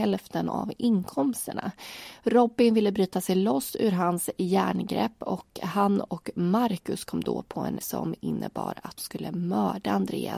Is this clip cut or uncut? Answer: cut